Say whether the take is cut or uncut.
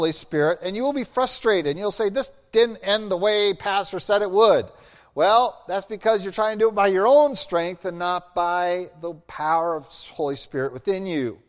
uncut